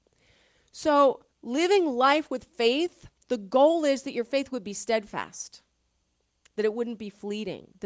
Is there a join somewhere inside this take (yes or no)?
yes